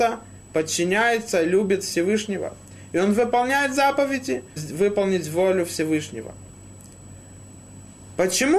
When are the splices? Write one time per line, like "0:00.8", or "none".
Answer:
0:04.6